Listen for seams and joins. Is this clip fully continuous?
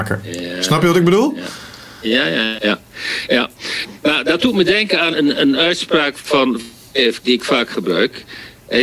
no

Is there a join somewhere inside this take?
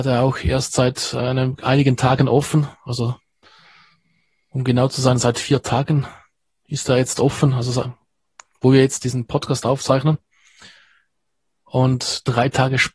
no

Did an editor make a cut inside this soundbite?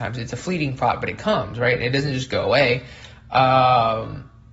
no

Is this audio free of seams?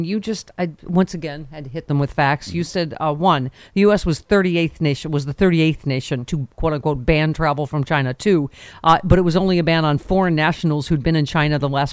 yes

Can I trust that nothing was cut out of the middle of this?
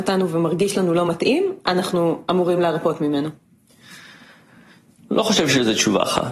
yes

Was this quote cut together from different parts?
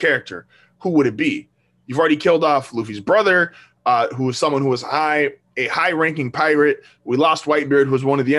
no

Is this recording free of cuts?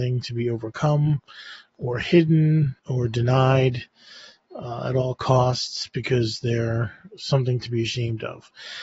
no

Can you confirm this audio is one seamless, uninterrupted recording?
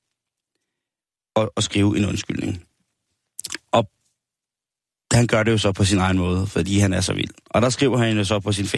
yes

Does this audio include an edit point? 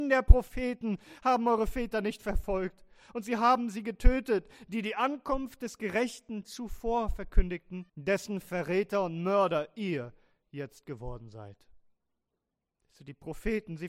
yes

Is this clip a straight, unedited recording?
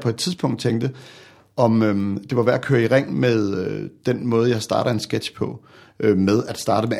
yes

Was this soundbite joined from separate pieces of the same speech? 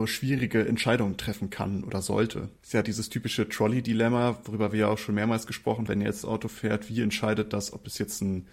yes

